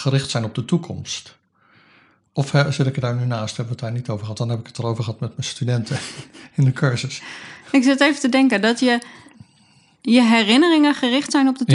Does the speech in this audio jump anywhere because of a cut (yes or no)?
no